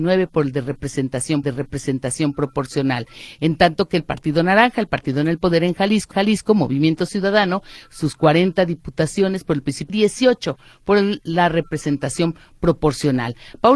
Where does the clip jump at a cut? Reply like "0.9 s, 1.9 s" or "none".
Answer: 1.4 s, 6.1 s, 9.9 s